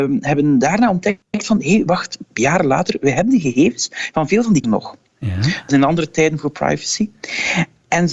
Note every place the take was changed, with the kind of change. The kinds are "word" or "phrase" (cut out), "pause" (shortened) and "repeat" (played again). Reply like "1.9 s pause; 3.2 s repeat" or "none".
4.6 s word; 5.7 s word